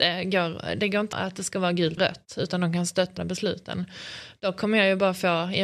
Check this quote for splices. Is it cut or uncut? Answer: cut